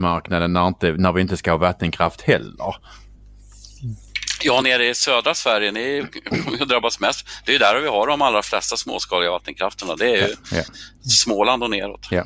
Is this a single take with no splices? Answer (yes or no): no